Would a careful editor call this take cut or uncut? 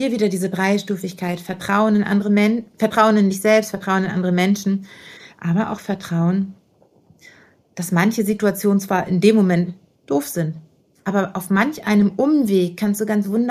uncut